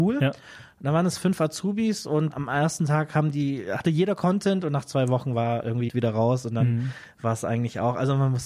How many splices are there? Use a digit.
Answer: 2